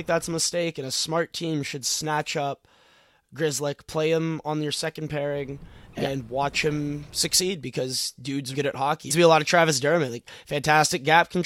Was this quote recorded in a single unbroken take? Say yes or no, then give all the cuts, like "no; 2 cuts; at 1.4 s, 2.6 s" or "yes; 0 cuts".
no; 2 cuts; at 8.5 s, 9.1 s